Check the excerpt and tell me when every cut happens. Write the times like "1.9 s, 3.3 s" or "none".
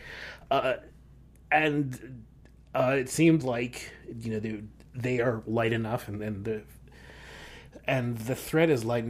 none